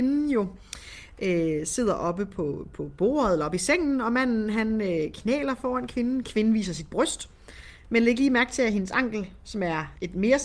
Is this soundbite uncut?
yes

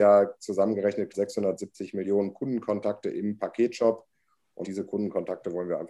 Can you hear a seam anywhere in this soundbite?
yes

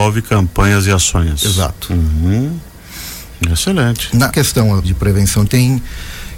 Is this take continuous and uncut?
no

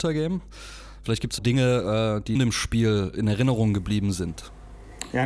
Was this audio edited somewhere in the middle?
yes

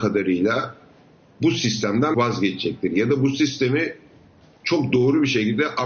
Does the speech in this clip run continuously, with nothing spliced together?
no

